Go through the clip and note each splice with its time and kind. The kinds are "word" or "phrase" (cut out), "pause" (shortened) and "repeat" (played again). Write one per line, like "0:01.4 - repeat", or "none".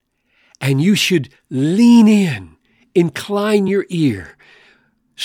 none